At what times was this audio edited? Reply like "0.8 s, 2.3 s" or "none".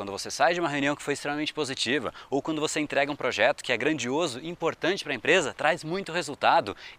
none

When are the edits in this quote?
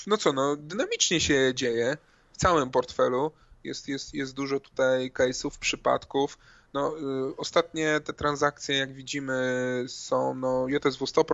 none

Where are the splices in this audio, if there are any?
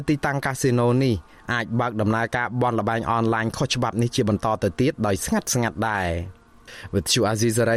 none

